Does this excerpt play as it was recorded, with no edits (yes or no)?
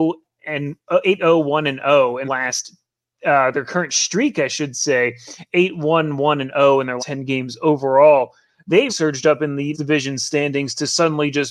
no